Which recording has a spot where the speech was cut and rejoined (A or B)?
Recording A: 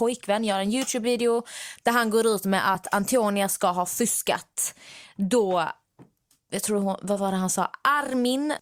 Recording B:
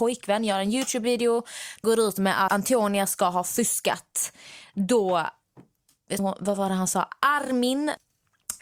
B